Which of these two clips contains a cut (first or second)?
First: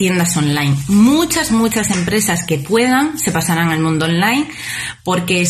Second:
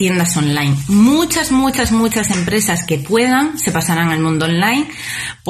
first